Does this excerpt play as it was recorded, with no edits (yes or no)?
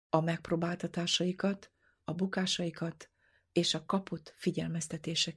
yes